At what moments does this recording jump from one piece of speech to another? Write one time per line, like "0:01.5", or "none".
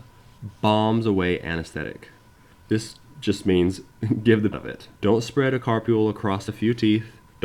0:04.5